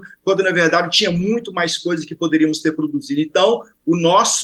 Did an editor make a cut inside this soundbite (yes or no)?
no